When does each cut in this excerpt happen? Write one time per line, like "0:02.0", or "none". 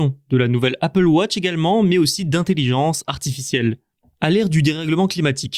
none